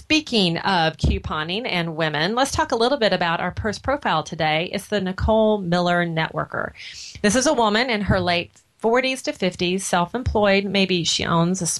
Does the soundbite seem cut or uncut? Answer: uncut